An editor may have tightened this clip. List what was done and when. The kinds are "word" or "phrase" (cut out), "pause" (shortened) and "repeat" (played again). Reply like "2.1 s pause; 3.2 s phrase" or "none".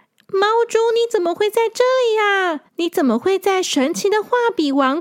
2.7 s pause